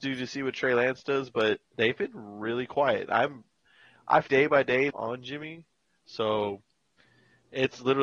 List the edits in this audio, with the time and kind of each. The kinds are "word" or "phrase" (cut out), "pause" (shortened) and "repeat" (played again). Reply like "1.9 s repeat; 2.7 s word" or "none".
1.7 s pause; 4.3 s word; 4.9 s phrase